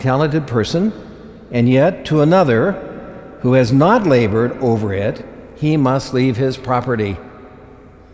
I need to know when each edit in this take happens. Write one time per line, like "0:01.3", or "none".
none

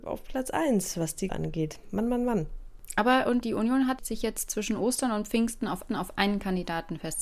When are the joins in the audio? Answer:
0:01.3
0:03.4
0:04.0
0:05.9

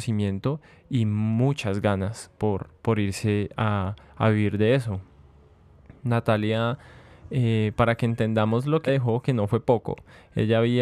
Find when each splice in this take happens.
0:08.9

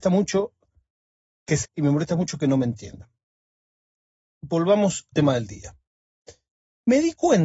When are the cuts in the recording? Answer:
0:01.6
0:05.1

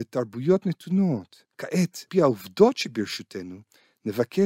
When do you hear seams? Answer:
0:02.1

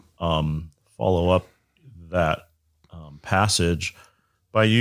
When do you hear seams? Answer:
none

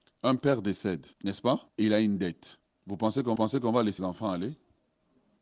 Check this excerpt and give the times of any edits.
0:01.1
0:01.7
0:02.7
0:03.4
0:04.0

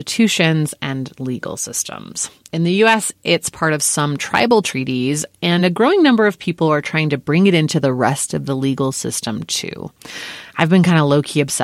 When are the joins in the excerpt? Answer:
none

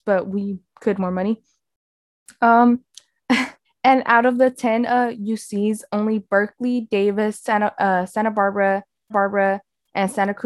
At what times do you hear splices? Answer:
0:01.0
0:03.6
0:09.1

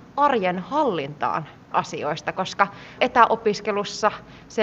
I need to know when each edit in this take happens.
0:01.7
0:03.0

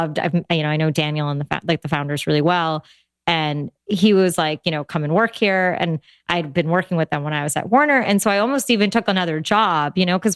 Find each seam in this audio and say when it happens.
none

